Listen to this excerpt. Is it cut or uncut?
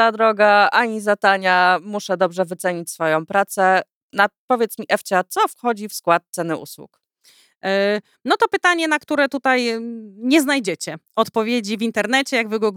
uncut